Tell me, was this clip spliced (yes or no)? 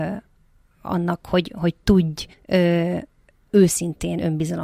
yes